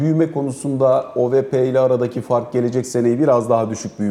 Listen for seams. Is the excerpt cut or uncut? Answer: uncut